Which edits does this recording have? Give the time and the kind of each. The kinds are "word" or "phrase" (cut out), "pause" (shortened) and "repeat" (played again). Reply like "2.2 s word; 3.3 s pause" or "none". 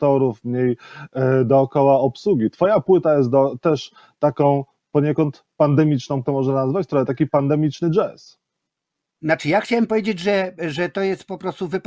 6.2 s phrase